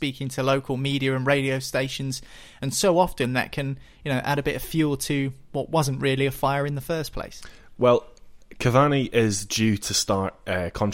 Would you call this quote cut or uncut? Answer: uncut